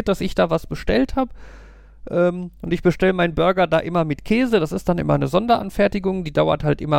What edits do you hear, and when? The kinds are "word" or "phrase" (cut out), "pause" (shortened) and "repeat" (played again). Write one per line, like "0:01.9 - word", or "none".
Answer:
none